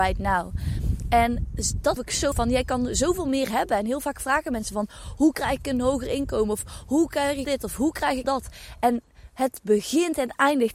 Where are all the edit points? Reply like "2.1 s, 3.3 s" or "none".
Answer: 2.0 s, 2.3 s, 7.4 s, 8.2 s